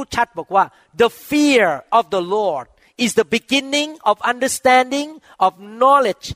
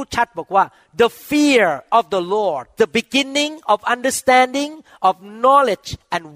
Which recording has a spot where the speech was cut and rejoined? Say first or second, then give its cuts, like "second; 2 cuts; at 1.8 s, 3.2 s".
second; 1 cut; at 2.8 s